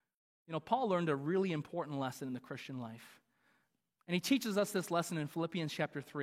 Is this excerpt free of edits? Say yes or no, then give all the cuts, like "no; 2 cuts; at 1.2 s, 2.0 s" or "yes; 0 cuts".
yes; 0 cuts